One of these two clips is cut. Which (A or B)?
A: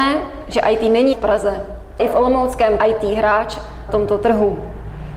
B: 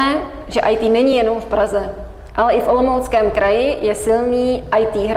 A